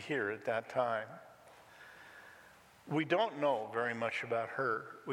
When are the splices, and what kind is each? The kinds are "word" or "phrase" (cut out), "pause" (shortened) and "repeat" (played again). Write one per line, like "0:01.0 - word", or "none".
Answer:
none